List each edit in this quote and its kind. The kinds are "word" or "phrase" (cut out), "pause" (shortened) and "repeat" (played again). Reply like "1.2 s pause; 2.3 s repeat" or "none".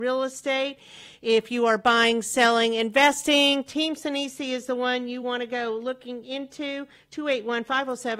none